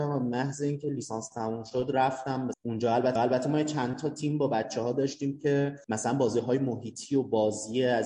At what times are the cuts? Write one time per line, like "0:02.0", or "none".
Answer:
0:02.5
0:03.2
0:05.8